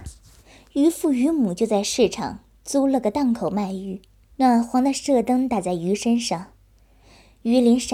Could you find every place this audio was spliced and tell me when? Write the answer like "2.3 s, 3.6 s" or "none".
4.2 s